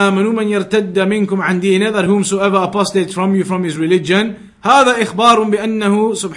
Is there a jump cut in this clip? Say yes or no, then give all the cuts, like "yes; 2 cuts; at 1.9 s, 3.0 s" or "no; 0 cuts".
no; 0 cuts